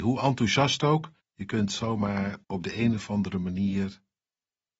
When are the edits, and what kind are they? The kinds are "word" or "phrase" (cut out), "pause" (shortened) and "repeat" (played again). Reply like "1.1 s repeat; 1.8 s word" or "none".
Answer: 1.2 s pause; 2.4 s pause